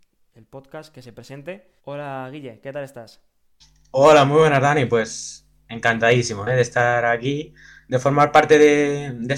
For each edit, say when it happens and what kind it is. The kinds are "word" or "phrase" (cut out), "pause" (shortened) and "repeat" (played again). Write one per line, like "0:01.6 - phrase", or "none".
0:01.8 - pause